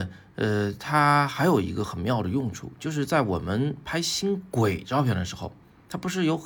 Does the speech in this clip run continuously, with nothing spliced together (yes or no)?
yes